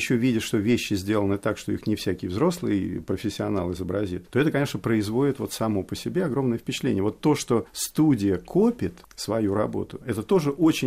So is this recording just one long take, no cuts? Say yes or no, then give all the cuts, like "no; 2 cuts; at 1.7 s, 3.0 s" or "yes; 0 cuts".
yes; 0 cuts